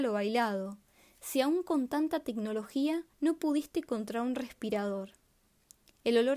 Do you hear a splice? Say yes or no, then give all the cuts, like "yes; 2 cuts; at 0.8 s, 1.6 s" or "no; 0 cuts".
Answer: yes; 1 cut; at 3.1 s